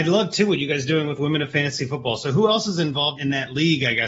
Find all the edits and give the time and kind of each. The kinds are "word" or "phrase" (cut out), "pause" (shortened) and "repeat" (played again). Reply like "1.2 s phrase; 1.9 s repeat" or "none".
3.2 s word